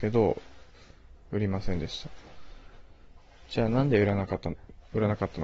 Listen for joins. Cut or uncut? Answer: uncut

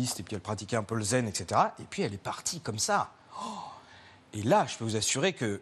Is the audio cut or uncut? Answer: uncut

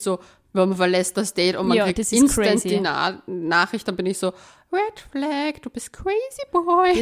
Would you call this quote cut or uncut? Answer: uncut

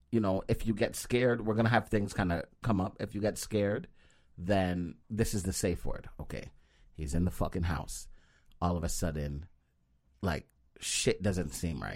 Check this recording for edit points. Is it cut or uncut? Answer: cut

